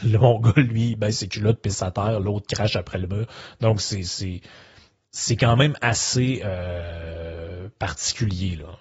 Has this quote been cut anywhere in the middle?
no; 0 cuts

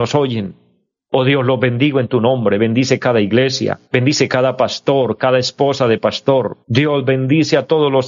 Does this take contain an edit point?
yes; 2 cuts; at 3.8 s, 6.6 s

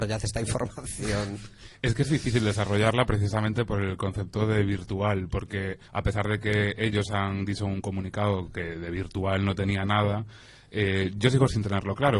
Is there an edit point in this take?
yes; 1 cut; at 5.8 s

